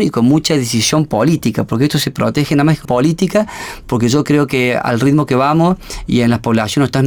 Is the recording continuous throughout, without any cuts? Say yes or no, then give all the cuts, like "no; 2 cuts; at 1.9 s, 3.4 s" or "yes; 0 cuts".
no; 1 cut; at 2.8 s